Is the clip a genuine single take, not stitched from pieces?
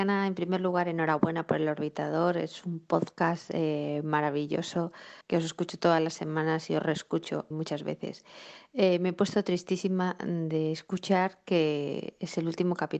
no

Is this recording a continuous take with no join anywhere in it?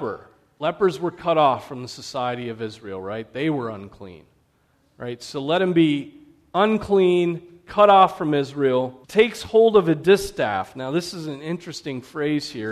no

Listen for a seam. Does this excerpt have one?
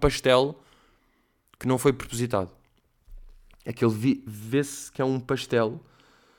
no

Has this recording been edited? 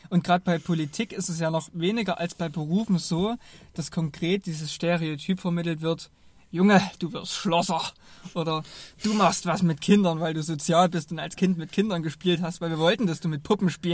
no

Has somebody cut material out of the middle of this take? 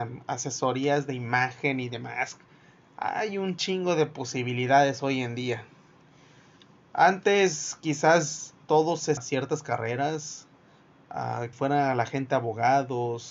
yes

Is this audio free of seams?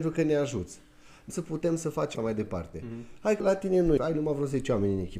no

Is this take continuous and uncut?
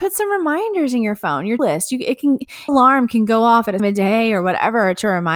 no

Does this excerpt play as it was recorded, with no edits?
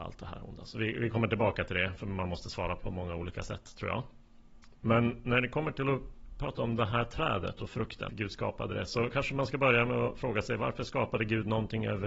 no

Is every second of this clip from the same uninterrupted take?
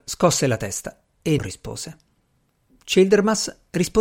no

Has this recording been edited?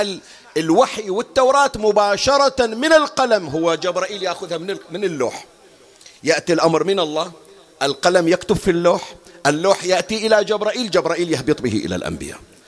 no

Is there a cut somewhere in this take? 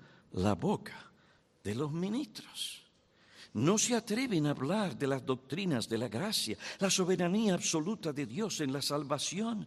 no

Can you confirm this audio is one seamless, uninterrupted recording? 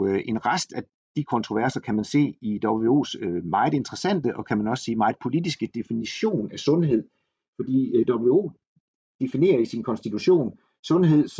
yes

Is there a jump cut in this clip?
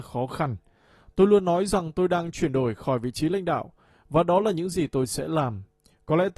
no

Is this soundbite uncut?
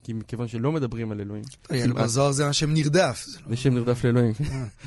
yes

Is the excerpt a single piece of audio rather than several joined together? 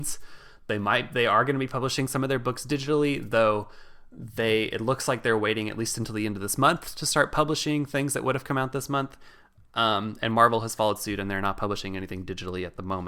yes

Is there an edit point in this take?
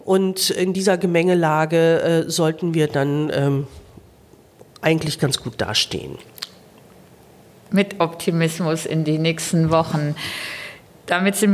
no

